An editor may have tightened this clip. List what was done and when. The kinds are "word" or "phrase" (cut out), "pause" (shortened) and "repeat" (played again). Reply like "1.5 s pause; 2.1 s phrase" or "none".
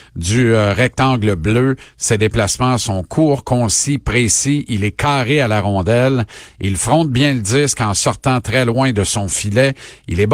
none